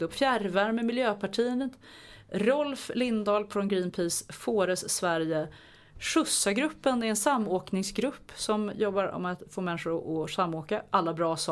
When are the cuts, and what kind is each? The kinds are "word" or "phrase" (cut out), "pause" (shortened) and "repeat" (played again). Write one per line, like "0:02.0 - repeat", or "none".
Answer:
none